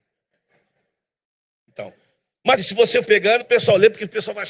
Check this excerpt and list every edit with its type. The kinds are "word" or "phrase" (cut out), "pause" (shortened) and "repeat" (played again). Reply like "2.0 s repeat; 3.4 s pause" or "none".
2.6 s word; 3.0 s word; 3.4 s word